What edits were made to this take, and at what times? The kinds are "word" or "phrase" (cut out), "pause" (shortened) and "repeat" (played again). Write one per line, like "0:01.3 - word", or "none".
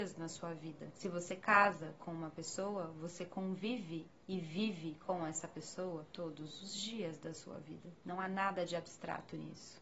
none